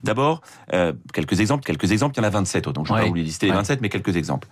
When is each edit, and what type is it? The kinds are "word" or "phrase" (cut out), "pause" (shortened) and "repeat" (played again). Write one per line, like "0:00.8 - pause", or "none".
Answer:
0:01.6 - repeat
0:02.7 - word